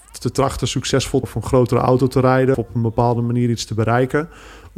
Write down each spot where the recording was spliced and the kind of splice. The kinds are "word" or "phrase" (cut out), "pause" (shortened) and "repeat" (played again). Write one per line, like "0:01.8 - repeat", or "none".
0:01.2 - word
0:02.5 - word